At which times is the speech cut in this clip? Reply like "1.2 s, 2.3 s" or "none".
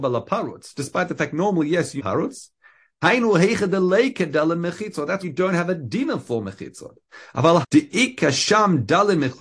2.0 s, 5.2 s, 7.6 s